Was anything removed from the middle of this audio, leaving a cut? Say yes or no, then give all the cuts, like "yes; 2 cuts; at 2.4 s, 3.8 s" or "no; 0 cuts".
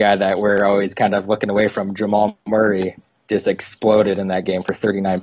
no; 0 cuts